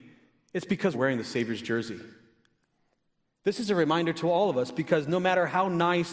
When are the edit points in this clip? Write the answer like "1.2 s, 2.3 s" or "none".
0.9 s